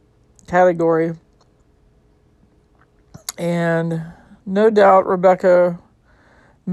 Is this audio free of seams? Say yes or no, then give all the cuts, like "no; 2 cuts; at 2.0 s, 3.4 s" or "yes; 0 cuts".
yes; 0 cuts